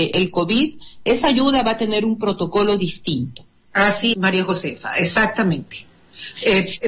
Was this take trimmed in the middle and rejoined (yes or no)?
yes